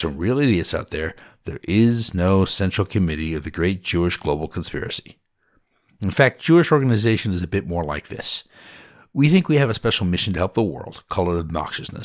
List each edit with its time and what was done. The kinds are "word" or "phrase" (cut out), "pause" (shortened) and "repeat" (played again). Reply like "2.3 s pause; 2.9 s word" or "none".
none